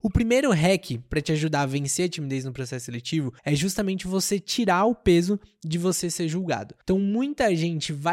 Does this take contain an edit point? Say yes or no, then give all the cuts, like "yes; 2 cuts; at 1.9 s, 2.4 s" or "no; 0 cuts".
yes; 2 cuts; at 3.4 s, 6.8 s